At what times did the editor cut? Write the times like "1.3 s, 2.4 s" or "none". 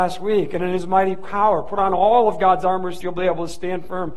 3.0 s